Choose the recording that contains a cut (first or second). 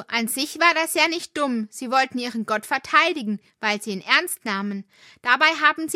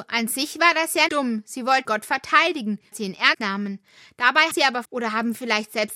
second